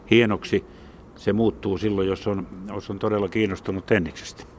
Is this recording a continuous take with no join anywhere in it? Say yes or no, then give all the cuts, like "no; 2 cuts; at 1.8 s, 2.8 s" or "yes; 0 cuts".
yes; 0 cuts